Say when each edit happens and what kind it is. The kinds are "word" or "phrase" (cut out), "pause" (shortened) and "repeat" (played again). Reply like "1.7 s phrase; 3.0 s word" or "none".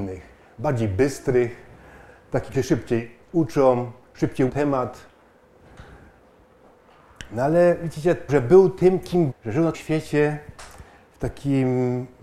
2.5 s word; 4.5 s word; 8.3 s word; 9.3 s word; 9.7 s word